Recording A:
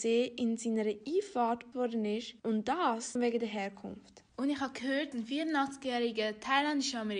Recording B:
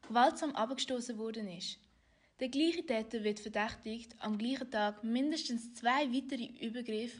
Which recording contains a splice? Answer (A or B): A